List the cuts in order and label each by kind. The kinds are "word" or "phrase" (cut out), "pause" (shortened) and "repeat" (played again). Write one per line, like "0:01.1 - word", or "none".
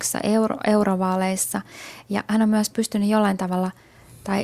none